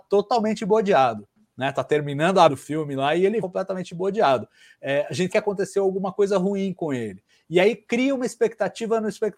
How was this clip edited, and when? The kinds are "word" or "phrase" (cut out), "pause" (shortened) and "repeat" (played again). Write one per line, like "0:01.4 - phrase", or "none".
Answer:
0:02.5 - word
0:03.4 - word
0:05.3 - word